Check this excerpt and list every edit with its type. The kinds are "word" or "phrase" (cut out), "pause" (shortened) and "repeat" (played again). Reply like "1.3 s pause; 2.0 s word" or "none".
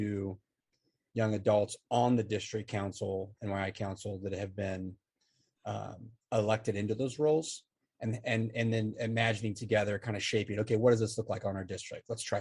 none